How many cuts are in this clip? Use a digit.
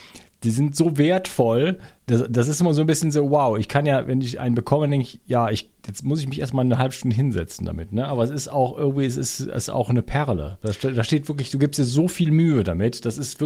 2